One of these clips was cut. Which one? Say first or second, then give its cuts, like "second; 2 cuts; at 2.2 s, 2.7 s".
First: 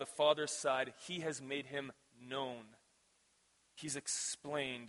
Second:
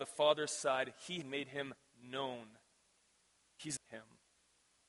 second; 2 cuts; at 1.2 s, 3.8 s